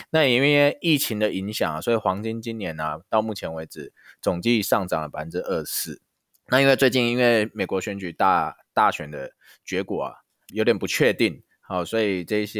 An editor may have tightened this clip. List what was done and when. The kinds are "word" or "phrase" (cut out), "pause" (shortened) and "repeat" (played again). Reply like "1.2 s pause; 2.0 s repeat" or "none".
6.1 s pause; 10.5 s word

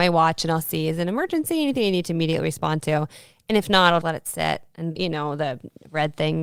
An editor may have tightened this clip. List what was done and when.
4.0 s word; 5.0 s word

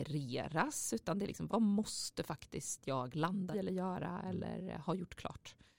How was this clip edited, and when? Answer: 1.5 s word; 3.5 s word

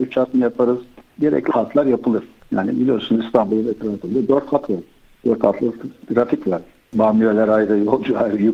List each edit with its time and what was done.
none

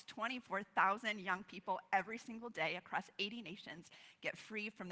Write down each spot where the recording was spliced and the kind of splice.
none

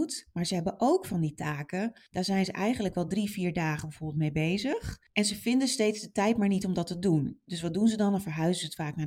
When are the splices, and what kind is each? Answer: none

